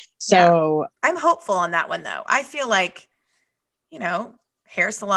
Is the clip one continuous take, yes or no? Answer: yes